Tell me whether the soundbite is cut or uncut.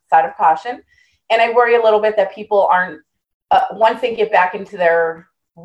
uncut